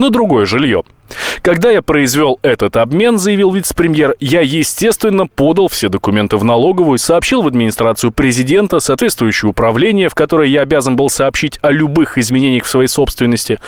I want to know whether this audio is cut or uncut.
uncut